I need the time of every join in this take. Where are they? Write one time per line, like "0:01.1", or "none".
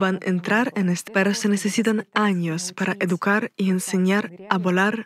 0:01.1